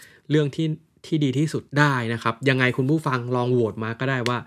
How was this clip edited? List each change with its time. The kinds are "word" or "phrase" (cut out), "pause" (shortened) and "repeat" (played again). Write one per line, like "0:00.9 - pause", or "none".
0:01.7 - pause

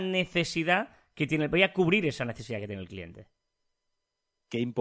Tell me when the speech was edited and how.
none

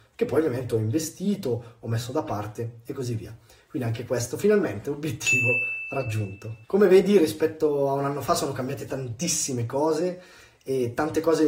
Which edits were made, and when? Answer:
0:06.6 - pause

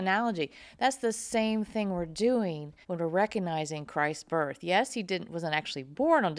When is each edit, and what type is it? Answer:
0:02.8 - pause

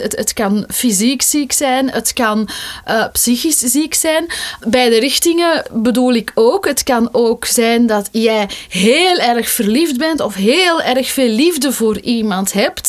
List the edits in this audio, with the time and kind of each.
none

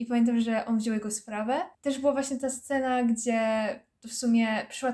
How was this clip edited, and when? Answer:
0:01.7 - pause

